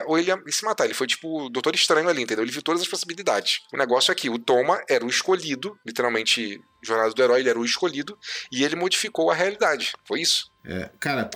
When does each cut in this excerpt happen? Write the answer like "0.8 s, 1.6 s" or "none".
none